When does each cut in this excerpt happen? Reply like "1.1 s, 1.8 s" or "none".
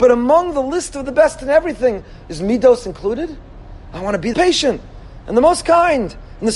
4.3 s